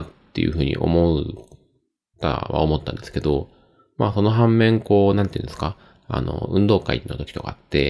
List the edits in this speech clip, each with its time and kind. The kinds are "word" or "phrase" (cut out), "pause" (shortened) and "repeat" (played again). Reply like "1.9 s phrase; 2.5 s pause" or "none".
none